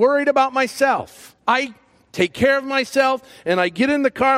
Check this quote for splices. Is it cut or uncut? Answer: cut